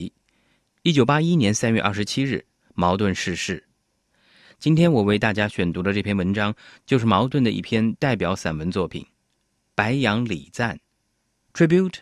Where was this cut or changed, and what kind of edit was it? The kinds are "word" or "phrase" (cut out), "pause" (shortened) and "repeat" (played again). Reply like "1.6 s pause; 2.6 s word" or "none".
none